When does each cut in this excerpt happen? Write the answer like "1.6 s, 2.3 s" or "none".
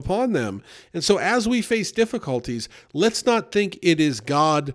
none